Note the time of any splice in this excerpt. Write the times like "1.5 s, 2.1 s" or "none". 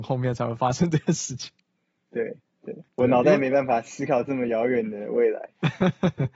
2.9 s